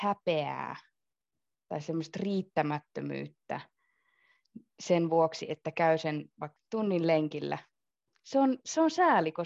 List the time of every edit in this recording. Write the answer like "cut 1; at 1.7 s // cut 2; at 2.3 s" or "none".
cut 1; at 6.6 s